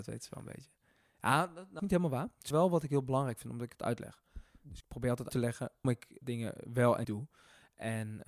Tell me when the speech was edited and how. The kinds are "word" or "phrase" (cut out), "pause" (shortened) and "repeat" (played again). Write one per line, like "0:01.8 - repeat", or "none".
0:01.8 - word
0:02.5 - word
0:03.8 - word
0:04.8 - word
0:05.3 - word
0:05.8 - word
0:06.2 - word
0:07.0 - word

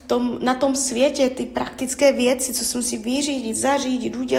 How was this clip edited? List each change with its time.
none

